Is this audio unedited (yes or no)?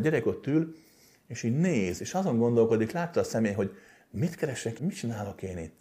no